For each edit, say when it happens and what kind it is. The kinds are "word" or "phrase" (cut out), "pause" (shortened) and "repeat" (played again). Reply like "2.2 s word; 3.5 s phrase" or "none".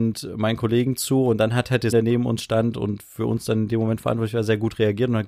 1.9 s word